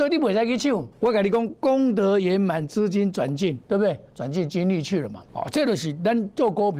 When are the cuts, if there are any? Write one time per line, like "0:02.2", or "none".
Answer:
0:00.9
0:03.6
0:05.3

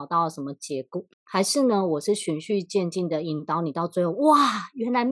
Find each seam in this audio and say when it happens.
0:01.1

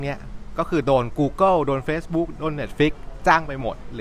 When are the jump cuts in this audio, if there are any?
none

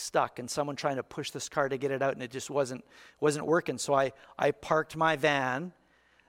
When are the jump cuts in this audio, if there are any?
none

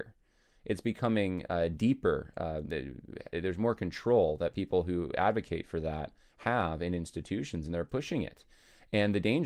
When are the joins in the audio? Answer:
none

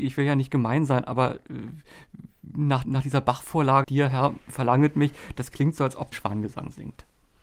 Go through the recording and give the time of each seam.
0:02.8
0:03.8
0:06.1

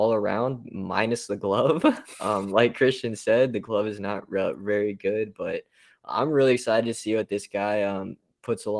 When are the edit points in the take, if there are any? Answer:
none

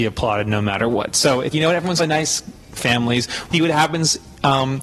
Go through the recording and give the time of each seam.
0:01.5
0:02.0
0:02.8
0:03.5

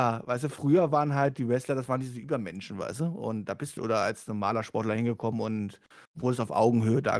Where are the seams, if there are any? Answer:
0:03.8
0:06.0

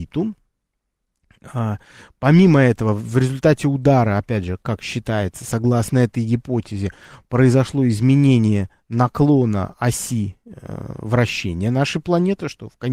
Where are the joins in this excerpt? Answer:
none

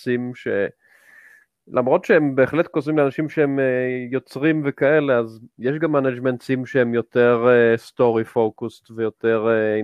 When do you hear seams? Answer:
none

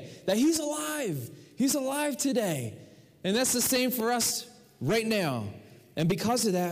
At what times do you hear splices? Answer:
none

